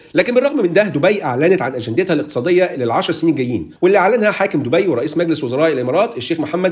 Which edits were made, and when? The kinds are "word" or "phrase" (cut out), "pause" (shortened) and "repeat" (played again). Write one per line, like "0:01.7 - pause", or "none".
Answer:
0:03.8 - pause